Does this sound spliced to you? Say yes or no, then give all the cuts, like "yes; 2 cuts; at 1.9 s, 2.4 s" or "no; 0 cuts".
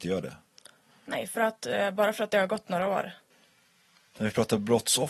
no; 0 cuts